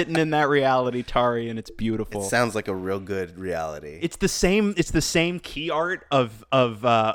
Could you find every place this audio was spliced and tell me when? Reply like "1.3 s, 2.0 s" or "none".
none